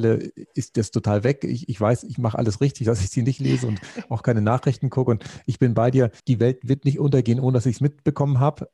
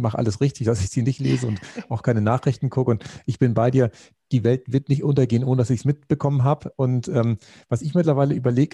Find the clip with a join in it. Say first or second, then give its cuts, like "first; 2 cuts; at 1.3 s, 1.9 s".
first; 1 cut; at 6.2 s